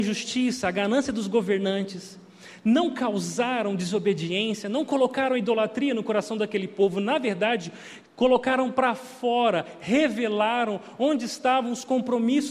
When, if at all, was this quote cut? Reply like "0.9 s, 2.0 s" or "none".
8.1 s